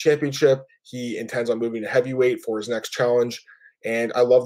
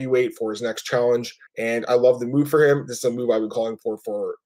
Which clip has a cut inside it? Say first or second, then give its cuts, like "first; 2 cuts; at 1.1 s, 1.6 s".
second; 1 cut; at 1.5 s